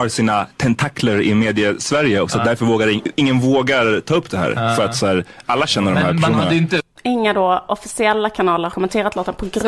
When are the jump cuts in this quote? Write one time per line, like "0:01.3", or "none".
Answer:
0:08.7